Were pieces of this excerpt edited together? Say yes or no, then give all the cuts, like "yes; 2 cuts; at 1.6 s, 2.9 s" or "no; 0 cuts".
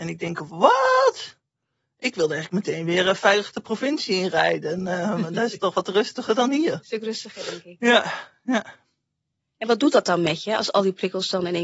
no; 0 cuts